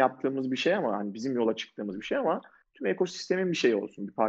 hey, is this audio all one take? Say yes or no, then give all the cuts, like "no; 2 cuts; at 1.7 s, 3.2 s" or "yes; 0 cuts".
yes; 0 cuts